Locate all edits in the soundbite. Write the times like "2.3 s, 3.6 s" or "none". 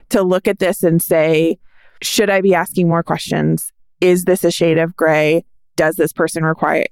none